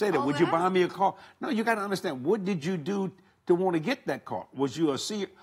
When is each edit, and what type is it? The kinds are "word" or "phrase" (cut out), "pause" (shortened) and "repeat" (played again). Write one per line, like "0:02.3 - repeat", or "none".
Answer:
none